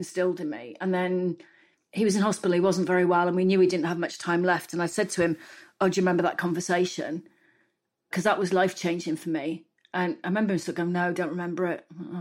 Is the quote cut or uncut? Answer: uncut